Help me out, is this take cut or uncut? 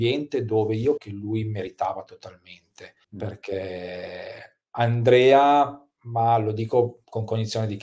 cut